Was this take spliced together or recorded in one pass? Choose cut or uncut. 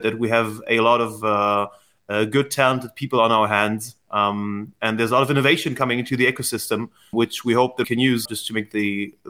cut